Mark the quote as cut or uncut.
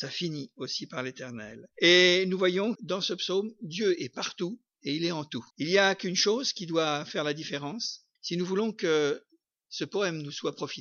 cut